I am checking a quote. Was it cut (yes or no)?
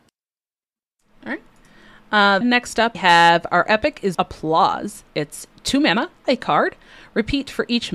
yes